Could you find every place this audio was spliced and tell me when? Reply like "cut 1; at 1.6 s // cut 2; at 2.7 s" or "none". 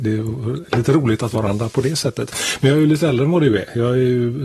cut 1; at 1.3 s